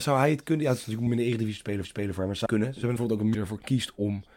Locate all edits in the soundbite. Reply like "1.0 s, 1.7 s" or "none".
1.1 s, 1.8 s, 2.5 s, 3.0 s, 3.3 s

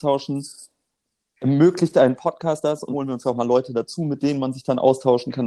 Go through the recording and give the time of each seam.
2.9 s

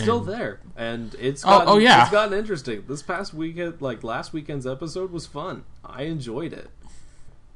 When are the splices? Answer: none

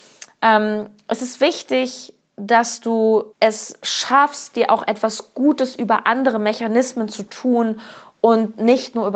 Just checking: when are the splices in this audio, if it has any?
3.3 s

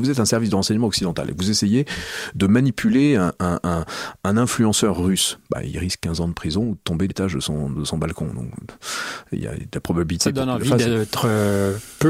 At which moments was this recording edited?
7.1 s

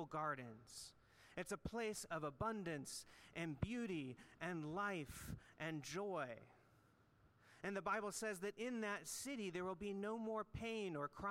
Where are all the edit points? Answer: none

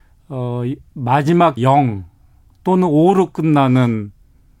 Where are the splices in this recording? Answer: 1.6 s

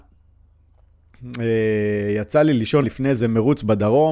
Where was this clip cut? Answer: 2.8 s

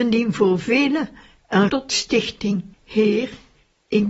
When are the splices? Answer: 1.7 s, 2.7 s

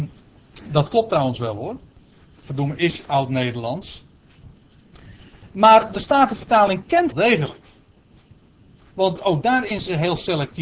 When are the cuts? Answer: 7.1 s

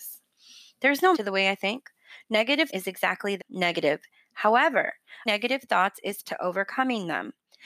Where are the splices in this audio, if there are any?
1.1 s, 2.7 s, 3.4 s, 5.3 s, 6.2 s

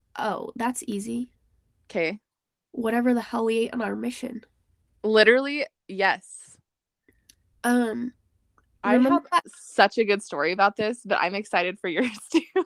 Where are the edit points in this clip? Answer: none

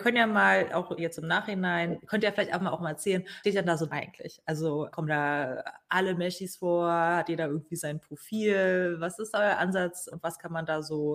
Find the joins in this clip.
1.0 s, 3.4 s, 3.9 s, 4.9 s, 10.1 s

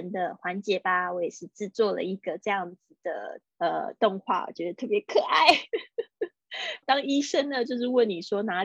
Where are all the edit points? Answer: 3.5 s, 6.8 s

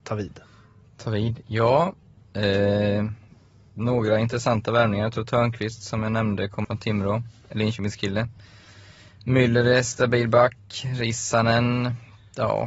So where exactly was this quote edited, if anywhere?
6.6 s

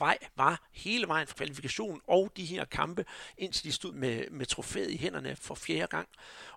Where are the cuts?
1.3 s, 3.9 s, 5.4 s

